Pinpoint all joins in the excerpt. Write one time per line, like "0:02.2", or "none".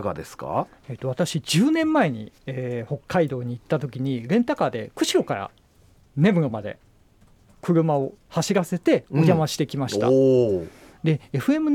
0:02.4
0:08.2